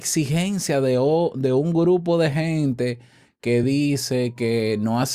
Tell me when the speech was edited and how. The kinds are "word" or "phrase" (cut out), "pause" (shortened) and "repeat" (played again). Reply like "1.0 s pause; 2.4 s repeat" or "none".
none